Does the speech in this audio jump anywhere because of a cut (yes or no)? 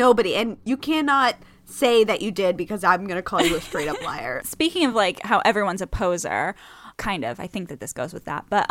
no